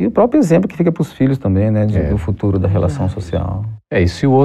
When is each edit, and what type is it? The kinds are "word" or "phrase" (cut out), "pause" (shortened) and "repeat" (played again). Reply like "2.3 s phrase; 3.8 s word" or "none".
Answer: none